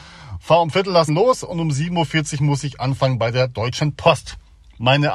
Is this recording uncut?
no; 1 cut; at 1.1 s

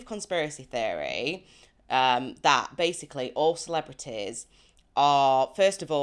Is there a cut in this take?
no; 0 cuts

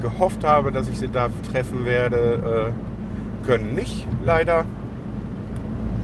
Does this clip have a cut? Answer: yes; 1 cut; at 1.4 s

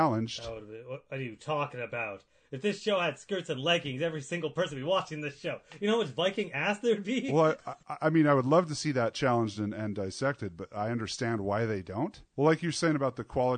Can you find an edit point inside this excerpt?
no; 0 cuts

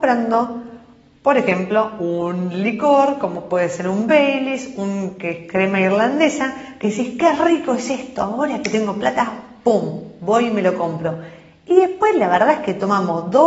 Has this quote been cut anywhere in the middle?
no; 0 cuts

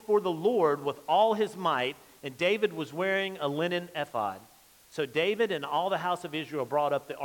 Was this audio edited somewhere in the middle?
no; 0 cuts

